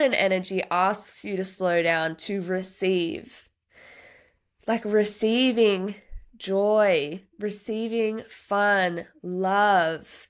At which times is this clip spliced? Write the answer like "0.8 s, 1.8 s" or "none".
none